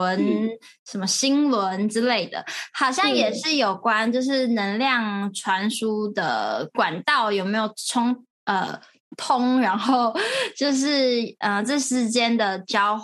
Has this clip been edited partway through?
no; 0 cuts

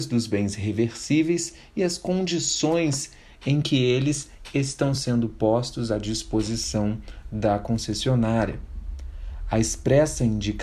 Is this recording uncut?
yes; 0 cuts

